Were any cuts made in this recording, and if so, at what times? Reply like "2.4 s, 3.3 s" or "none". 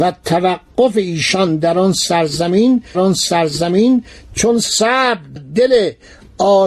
2.9 s, 5.4 s